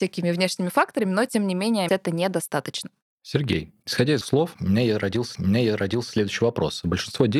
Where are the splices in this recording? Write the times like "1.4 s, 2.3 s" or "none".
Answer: 1.9 s, 3.8 s, 4.2 s, 5.3 s